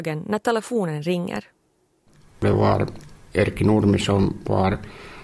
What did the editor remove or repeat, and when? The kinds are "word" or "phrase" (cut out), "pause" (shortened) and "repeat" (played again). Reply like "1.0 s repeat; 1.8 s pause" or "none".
none